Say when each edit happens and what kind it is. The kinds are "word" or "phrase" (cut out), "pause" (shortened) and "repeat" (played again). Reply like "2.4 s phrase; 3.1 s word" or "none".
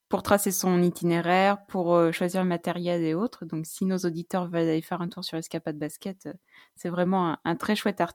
none